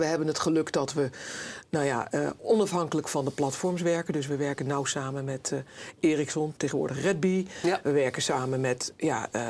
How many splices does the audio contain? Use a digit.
1